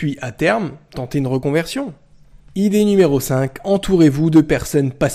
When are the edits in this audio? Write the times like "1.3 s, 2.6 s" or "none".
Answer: none

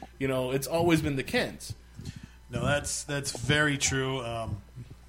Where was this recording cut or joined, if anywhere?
none

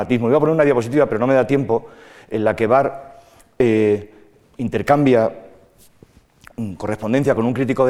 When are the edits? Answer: none

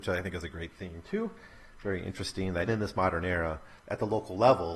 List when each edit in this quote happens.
2.7 s, 3.8 s

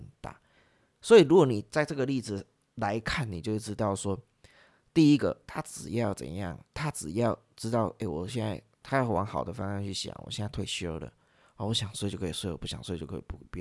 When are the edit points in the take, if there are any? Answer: 6.7 s

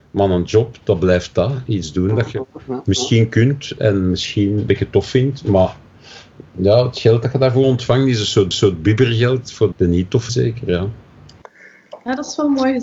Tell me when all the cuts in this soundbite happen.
4.7 s, 8.5 s, 9.7 s, 10.3 s

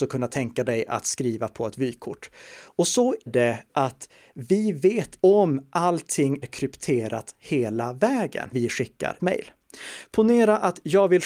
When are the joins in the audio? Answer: 3.3 s, 3.7 s, 5.2 s, 6.4 s, 8.5 s, 9.2 s

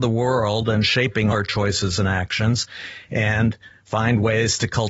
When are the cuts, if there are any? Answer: 1.3 s

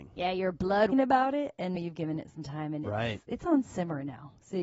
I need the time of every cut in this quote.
0.9 s, 1.8 s

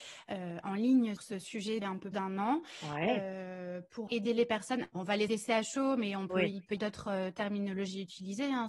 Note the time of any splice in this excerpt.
1.2 s, 1.8 s, 2.1 s, 4.1 s, 4.9 s, 5.3 s, 6.8 s

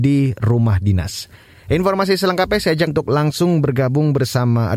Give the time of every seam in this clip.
2.9 s

